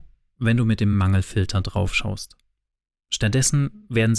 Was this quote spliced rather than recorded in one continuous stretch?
no; 0 cuts

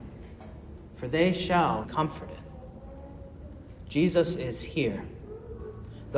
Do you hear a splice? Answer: yes; 1 cut; at 1.8 s

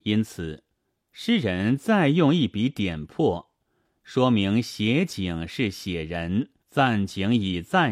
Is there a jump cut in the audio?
yes; 1 cut; at 6.6 s

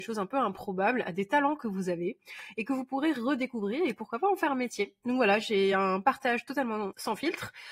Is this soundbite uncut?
yes; 0 cuts

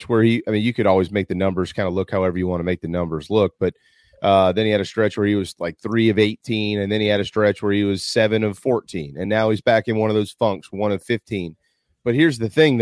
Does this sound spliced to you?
no; 0 cuts

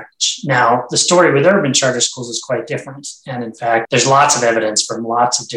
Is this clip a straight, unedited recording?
yes; 0 cuts

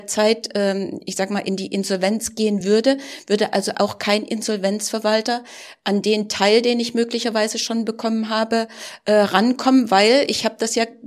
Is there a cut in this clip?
no; 0 cuts

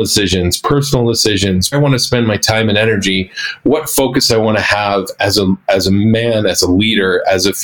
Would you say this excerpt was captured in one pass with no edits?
no; 1 cut; at 1.7 s

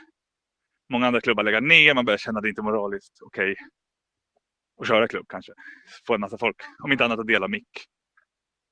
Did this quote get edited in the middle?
no; 0 cuts

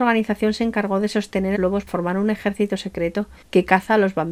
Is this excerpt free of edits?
no; 3 cuts; at 1.5 s, 1.9 s, 3.4 s

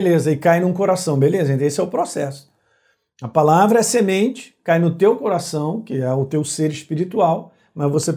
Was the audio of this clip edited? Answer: no; 0 cuts

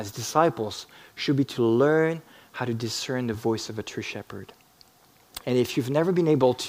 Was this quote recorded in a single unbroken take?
yes; 0 cuts

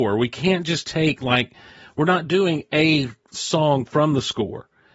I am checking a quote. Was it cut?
no; 0 cuts

